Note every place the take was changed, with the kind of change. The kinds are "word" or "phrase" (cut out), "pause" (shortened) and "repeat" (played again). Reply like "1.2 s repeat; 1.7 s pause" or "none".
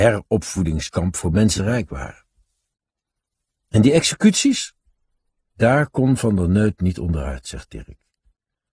1.6 s phrase